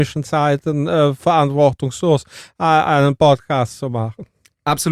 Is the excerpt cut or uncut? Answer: uncut